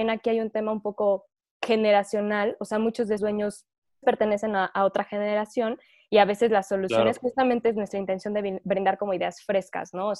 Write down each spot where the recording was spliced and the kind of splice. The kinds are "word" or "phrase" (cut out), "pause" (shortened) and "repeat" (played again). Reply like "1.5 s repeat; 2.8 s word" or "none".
3.2 s word; 4.0 s word